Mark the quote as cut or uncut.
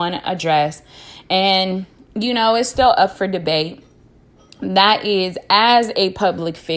uncut